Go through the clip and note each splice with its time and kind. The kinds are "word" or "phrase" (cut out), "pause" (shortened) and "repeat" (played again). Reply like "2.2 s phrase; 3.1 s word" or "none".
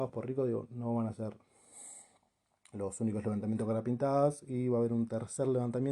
none